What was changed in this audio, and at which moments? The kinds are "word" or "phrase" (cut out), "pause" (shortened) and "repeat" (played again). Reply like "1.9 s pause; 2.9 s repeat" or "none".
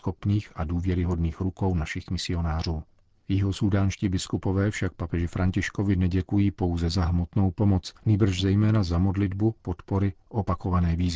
8.0 s pause; 9.6 s word

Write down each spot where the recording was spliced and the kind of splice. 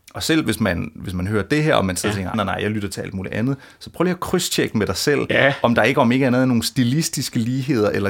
2.3 s word

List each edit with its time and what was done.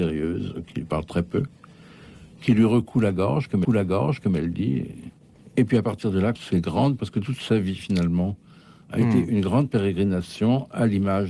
3.6 s repeat; 5.4 s pause; 6.4 s word; 7.0 s word

